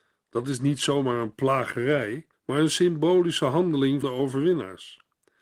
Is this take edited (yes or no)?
yes